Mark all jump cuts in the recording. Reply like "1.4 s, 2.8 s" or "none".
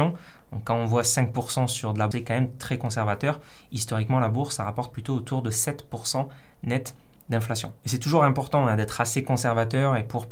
2.1 s, 7.8 s